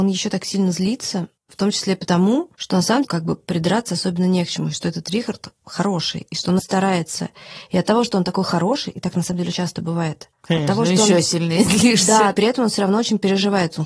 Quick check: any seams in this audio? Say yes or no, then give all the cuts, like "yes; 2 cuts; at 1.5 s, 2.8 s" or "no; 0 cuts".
yes; 6 cuts; at 1.4 s, 2.5 s, 3.0 s, 6.6 s, 9.5 s, 10.3 s